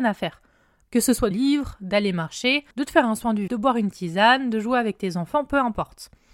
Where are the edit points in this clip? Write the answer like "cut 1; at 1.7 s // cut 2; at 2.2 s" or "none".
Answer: cut 1; at 1.3 s // cut 2; at 2.7 s // cut 3; at 3.5 s